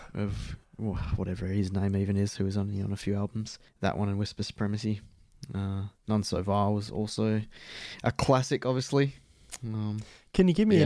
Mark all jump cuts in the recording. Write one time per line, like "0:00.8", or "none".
0:03.7
0:06.0